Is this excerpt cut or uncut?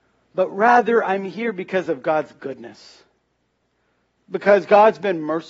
uncut